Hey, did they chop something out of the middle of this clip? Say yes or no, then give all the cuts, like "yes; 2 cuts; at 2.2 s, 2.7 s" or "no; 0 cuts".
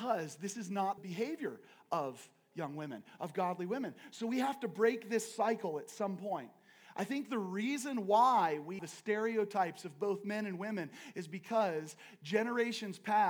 yes; 2 cuts; at 1.0 s, 8.8 s